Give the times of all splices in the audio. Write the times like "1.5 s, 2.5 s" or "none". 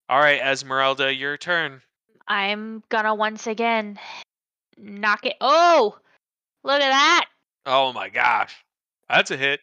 none